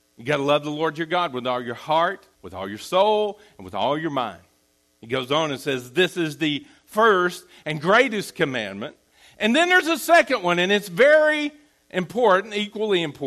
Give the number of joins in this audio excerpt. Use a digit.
3